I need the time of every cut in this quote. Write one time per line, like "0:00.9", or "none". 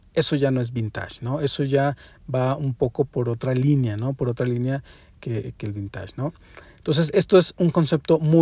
none